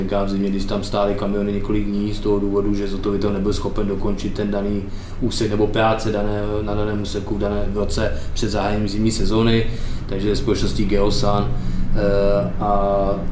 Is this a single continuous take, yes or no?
yes